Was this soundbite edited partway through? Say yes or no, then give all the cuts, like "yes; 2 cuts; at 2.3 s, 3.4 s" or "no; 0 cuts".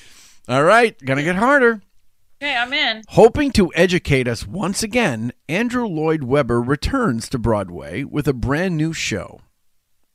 no; 0 cuts